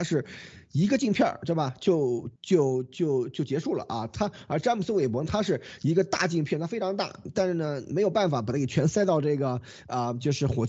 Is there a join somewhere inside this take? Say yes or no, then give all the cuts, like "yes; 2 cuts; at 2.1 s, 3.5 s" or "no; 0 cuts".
yes; 1 cut; at 2.4 s